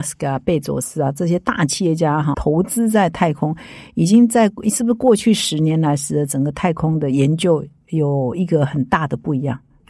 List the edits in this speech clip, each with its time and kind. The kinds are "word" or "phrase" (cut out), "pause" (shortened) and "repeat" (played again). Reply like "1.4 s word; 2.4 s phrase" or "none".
2.3 s word